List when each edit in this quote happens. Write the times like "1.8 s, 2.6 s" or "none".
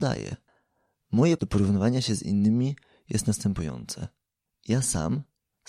1.4 s